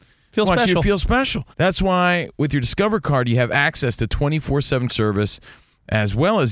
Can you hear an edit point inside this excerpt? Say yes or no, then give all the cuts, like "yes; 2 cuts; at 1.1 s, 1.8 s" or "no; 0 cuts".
yes; 2 cuts; at 1.5 s, 4.9 s